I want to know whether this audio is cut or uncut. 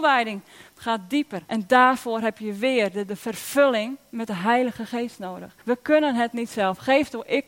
cut